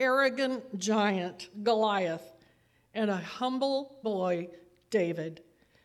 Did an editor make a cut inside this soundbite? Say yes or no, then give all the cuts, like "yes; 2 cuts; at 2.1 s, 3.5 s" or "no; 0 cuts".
yes; 1 cut; at 4.0 s